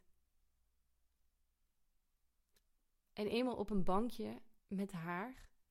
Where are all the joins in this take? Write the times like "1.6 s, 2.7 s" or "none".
4.6 s

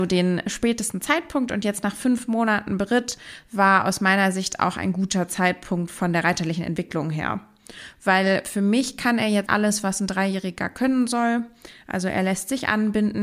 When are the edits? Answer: 9.5 s

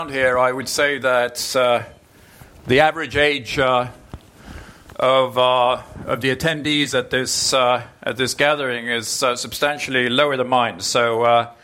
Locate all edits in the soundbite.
none

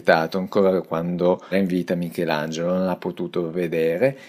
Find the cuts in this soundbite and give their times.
1.5 s

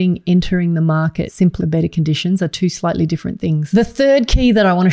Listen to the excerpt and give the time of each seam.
1.6 s

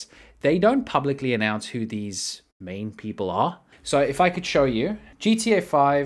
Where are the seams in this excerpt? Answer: 3.7 s, 5.1 s

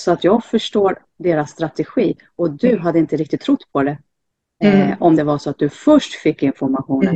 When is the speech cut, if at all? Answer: 5.2 s

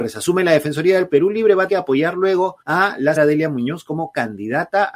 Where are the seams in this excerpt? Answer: 1.1 s, 1.7 s, 2.6 s, 3.2 s

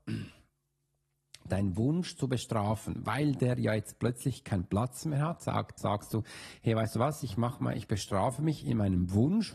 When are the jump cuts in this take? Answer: 5.8 s

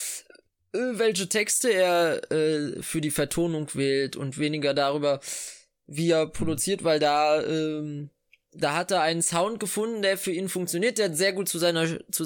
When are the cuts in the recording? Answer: none

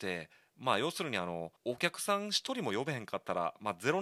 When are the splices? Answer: 1.6 s

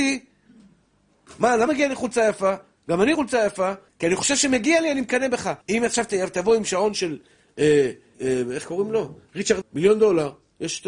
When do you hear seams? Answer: 1.7 s, 3.1 s, 3.9 s, 5.6 s, 8.1 s, 9.6 s

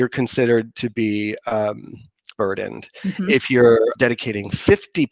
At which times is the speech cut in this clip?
2.4 s, 3.9 s

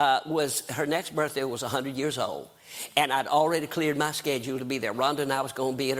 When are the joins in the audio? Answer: none

